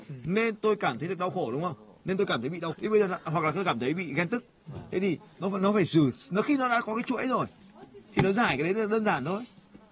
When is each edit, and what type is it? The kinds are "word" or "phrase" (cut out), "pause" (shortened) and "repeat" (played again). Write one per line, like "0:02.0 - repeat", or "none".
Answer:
0:02.7 - word